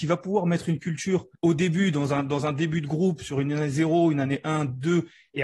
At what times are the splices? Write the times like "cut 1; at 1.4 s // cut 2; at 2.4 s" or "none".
cut 1; at 1.3 s